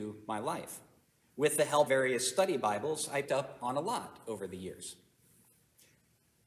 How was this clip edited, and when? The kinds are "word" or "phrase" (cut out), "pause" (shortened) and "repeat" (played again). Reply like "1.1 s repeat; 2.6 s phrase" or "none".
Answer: 1.0 s pause; 1.9 s word; 3.2 s word